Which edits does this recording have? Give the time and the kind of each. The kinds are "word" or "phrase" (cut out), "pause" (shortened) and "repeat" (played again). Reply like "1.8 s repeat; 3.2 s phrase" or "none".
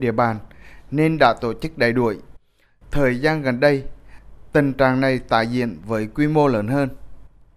none